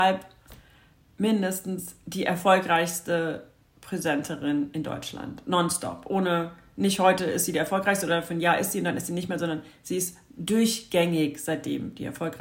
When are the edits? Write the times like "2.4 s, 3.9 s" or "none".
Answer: none